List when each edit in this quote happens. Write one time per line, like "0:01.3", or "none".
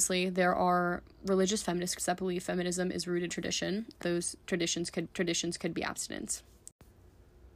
0:01.1
0:02.0
0:03.3
0:04.0
0:05.1